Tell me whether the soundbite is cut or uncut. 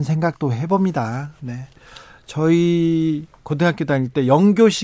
uncut